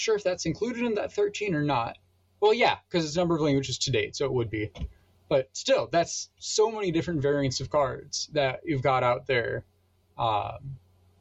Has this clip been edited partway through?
no; 0 cuts

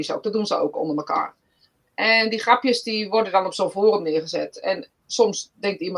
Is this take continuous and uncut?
yes; 0 cuts

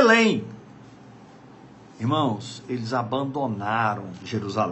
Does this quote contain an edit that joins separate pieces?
no; 0 cuts

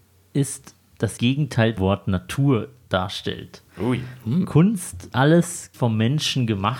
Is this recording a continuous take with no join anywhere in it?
no; 5 cuts; at 1.2 s, 1.8 s, 3.7 s, 5.1 s, 5.7 s

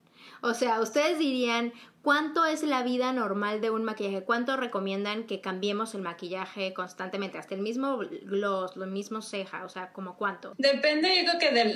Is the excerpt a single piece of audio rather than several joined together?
yes; 0 cuts

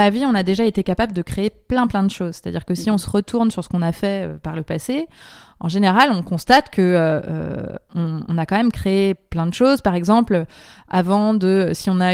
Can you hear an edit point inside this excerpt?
no; 0 cuts

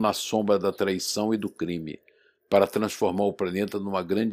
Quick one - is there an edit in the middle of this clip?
no; 0 cuts

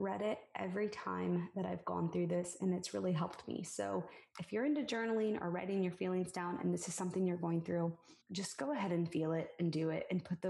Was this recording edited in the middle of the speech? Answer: yes; 1 cut; at 8.2 s

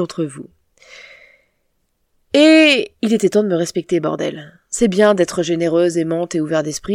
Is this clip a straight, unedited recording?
yes; 0 cuts

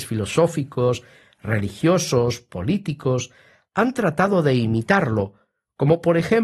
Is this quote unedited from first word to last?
yes; 0 cuts

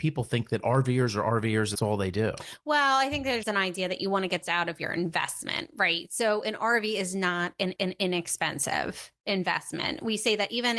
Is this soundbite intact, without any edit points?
no; 4 cuts; at 1.7 s, 3.4 s, 4.4 s, 7.8 s

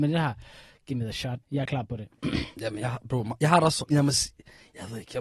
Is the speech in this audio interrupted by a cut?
yes; 2 cuts; at 1.4 s, 3.9 s

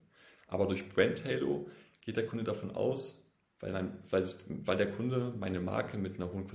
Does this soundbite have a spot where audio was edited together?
no; 0 cuts

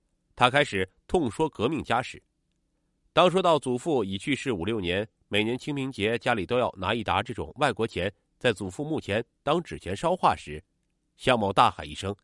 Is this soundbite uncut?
yes; 0 cuts

